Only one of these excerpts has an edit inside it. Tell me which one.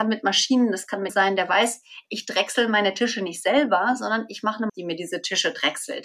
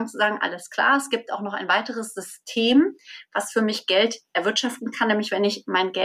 first; 2 cuts; at 1.1 s, 4.7 s

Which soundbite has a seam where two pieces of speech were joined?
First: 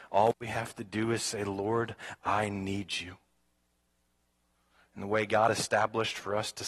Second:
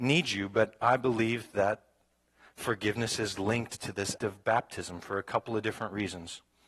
second; 1 cut; at 4.2 s

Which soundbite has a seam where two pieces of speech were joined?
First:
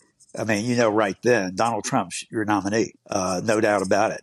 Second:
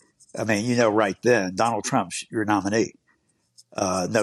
first; 1 cut; at 3.0 s

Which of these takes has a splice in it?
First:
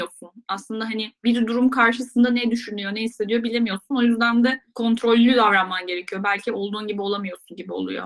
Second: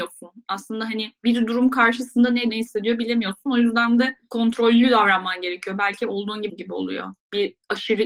second; 2 cuts; at 2.5 s, 6.5 s

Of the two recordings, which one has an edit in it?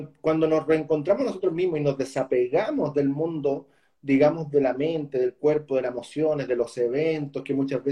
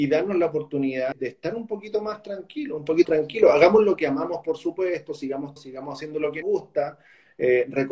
second; 4 cuts; at 1.1 s, 3.0 s, 5.6 s, 6.4 s

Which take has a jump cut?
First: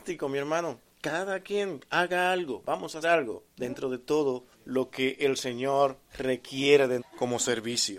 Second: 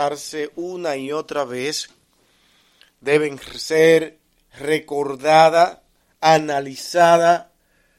first; 5 cuts; at 3.0 s, 3.5 s, 4.5 s, 6.1 s, 7.0 s

